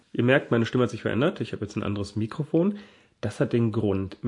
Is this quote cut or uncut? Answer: uncut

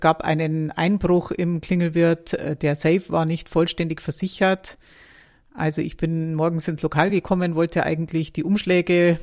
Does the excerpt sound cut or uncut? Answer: uncut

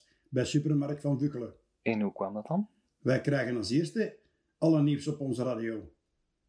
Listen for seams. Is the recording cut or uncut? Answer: uncut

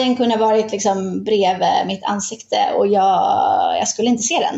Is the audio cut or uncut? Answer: uncut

